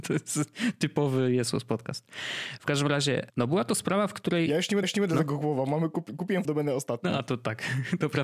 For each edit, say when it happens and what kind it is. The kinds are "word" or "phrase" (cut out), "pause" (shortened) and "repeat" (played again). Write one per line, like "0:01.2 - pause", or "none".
0:03.3 - word
0:04.8 - repeat
0:06.4 - word